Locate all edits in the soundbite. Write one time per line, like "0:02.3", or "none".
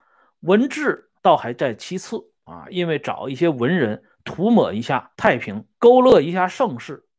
0:01.2
0:02.4
0:05.1
0:05.7